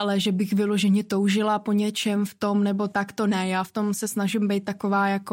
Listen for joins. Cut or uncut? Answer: uncut